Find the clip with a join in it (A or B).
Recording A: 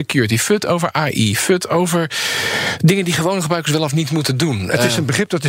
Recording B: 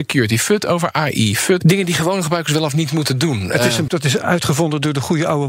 B